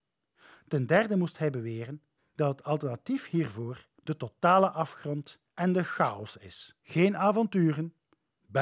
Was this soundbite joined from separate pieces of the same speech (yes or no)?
yes